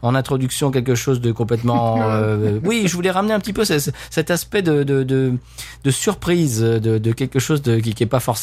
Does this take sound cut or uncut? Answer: uncut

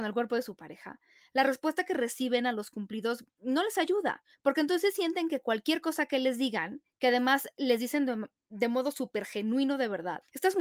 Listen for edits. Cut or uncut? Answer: uncut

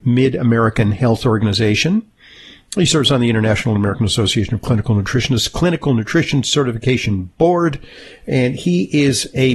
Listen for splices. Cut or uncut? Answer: uncut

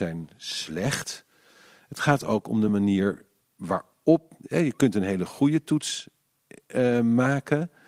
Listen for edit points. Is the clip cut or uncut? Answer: uncut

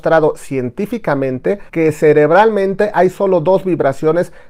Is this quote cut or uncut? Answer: cut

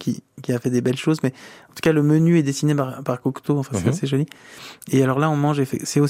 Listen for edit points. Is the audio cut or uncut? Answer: uncut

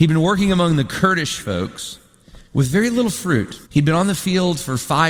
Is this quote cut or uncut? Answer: cut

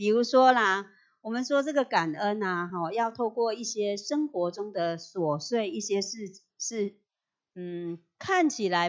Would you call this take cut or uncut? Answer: uncut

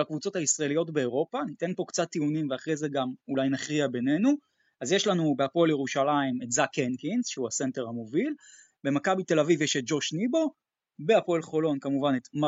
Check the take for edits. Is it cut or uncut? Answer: uncut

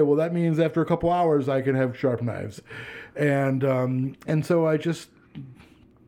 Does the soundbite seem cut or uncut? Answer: uncut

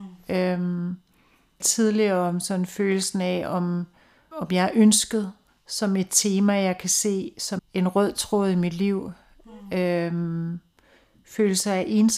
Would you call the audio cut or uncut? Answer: cut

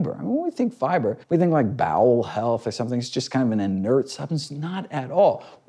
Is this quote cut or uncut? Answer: cut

